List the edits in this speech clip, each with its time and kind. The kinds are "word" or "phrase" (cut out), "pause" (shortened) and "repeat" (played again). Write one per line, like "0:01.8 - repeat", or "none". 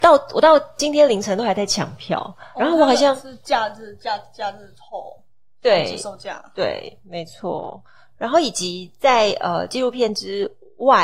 none